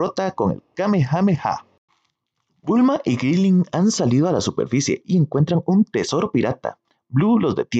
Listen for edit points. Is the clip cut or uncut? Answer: uncut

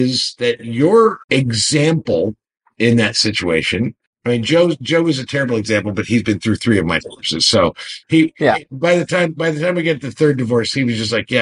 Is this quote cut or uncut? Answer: cut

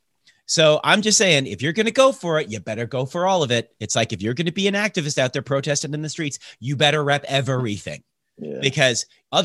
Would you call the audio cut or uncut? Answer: uncut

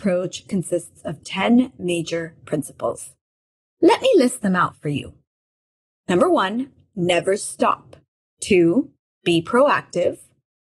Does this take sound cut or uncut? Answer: uncut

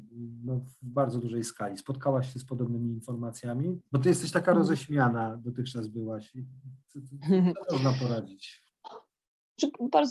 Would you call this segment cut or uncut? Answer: uncut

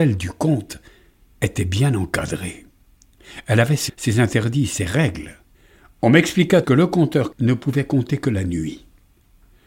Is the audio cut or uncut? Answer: cut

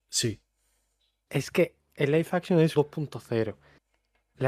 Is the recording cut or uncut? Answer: cut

